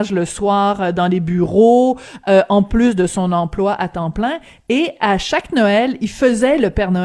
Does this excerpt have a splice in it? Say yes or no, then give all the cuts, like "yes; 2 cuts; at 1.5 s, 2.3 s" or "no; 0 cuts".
no; 0 cuts